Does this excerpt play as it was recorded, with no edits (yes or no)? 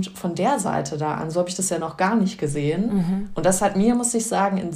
yes